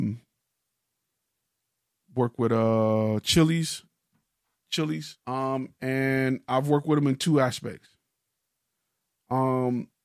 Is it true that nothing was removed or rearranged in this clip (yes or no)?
no